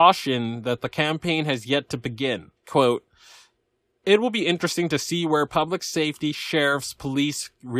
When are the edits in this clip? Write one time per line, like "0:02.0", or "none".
0:02.6